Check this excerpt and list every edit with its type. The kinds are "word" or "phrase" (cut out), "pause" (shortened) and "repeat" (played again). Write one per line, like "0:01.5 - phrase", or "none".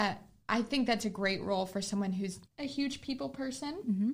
0:02.5 - word